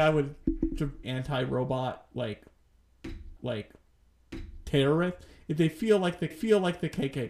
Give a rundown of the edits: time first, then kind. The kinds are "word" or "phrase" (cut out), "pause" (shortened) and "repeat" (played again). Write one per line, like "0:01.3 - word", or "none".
0:01.0 - phrase
0:03.4 - repeat
0:06.3 - repeat